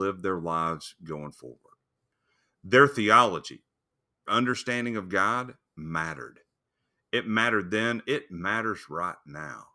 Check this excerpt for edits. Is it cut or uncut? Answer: cut